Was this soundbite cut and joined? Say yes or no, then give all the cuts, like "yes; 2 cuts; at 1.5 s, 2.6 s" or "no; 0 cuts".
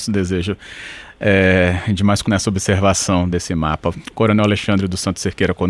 yes; 2 cuts; at 2.2 s, 3.3 s